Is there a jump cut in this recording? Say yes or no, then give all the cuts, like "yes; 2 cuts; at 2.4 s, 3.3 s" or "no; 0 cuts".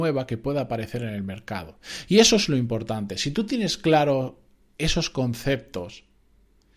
no; 0 cuts